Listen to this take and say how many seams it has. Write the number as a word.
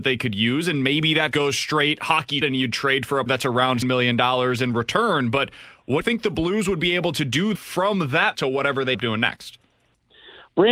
eight